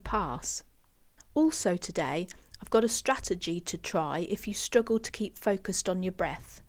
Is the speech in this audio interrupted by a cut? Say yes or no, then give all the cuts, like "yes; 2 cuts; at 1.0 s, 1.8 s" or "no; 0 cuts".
no; 0 cuts